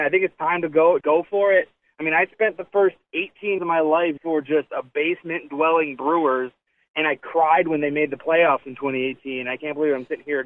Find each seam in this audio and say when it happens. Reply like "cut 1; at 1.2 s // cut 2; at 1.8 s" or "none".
cut 1; at 1.0 s // cut 2; at 3.6 s // cut 3; at 4.2 s